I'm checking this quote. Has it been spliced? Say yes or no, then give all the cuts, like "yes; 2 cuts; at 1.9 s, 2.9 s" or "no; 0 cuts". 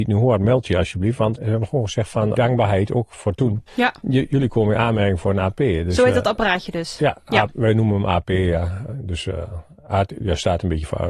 yes; 3 cuts; at 1.4 s, 2.4 s, 3.7 s